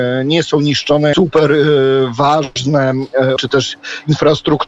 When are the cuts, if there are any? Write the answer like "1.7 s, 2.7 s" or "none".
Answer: 1.1 s, 3.4 s